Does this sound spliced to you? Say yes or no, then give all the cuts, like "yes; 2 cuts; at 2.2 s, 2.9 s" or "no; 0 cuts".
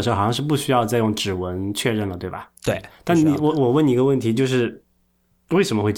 yes; 1 cut; at 2.6 s